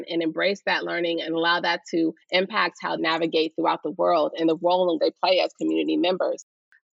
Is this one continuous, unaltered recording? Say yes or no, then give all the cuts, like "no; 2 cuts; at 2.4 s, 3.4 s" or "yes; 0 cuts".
no; 3 cuts; at 2.2 s, 3.0 s, 5.0 s